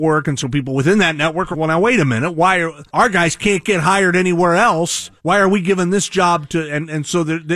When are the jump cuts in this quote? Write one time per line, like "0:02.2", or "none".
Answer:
0:01.5
0:02.9
0:05.2

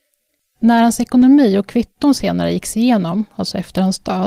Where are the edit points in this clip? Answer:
none

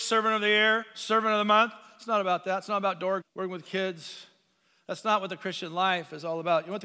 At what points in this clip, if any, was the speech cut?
0:03.2

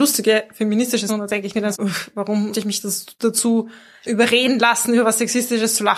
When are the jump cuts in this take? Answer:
0:01.1
0:01.7
0:02.5
0:04.0

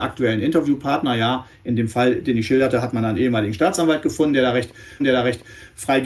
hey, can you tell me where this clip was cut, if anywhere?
0:05.0

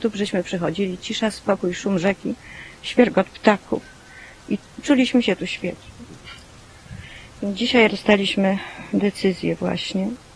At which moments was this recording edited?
0:07.9

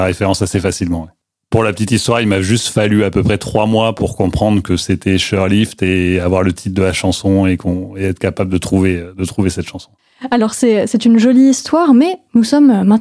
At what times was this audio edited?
none

